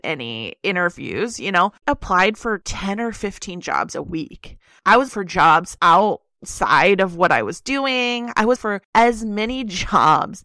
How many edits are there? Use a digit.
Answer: 3